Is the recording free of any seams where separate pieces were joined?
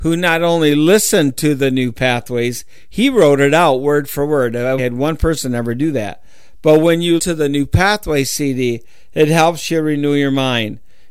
no; 2 cuts; at 4.8 s, 7.2 s

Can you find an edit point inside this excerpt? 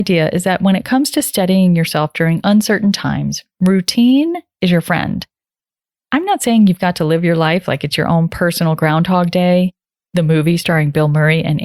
no; 0 cuts

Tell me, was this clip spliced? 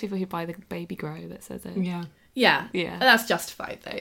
no; 0 cuts

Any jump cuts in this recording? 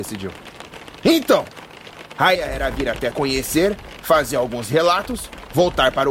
yes; 2 cuts; at 2.3 s, 3.1 s

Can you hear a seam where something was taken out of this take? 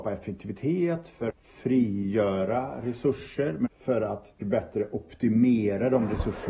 yes; 3 cuts; at 1.3 s, 3.7 s, 4.4 s

